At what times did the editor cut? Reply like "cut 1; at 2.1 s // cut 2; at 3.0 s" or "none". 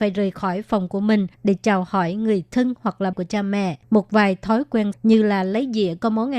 cut 1; at 1.3 s // cut 2; at 3.1 s // cut 3; at 3.8 s // cut 4; at 4.9 s